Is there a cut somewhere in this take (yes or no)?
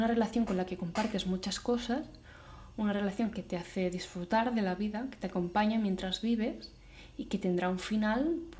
no